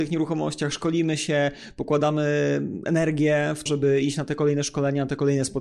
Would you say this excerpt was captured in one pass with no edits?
no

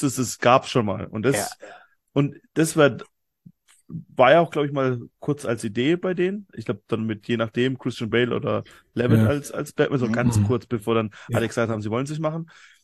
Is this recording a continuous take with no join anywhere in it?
yes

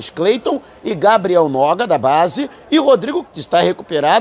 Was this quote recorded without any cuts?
no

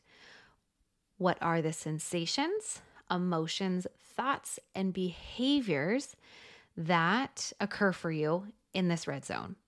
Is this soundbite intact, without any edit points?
yes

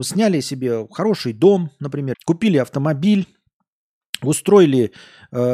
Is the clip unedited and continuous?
no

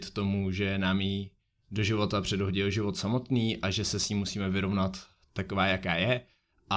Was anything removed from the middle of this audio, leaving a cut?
no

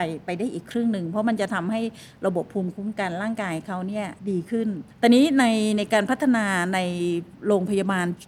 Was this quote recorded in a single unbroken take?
no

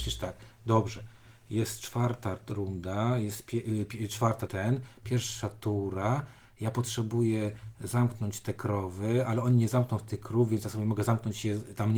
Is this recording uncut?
no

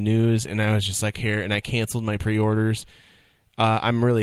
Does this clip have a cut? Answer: yes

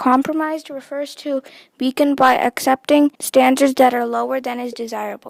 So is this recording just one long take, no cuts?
no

